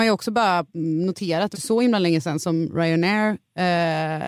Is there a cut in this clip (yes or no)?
yes